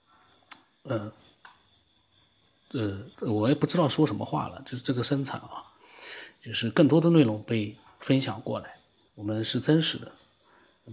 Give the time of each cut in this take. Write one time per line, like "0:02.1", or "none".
0:03.1
0:09.1